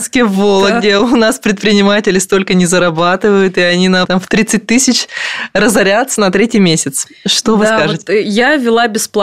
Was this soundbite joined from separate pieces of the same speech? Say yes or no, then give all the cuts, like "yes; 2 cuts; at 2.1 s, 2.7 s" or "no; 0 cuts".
yes; 1 cut; at 4.0 s